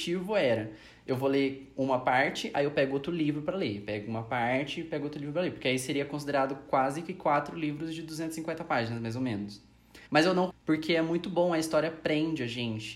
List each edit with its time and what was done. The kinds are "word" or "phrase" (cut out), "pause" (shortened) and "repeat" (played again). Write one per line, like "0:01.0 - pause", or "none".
0:10.1 - pause
0:10.5 - word